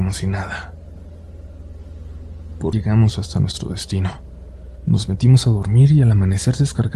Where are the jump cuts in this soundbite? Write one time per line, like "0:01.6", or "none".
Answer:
0:02.7